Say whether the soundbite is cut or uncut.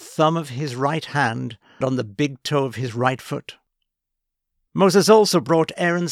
cut